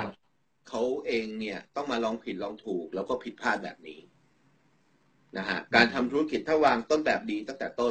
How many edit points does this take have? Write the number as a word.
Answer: two